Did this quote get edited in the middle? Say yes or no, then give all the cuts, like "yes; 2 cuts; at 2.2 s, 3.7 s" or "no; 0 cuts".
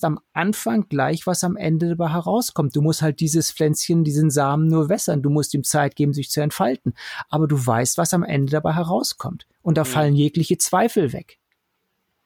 yes; 1 cut; at 9.5 s